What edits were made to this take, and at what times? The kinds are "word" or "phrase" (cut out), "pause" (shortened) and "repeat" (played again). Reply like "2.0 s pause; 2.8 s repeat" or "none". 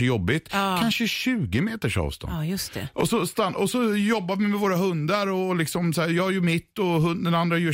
none